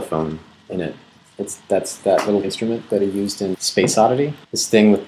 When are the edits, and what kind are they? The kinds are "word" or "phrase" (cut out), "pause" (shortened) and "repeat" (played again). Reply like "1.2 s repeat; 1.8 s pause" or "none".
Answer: 2.4 s word; 3.5 s word